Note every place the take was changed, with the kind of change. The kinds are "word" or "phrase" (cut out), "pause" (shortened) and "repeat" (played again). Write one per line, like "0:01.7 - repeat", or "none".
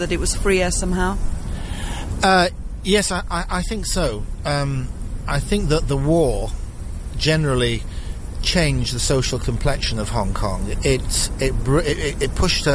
none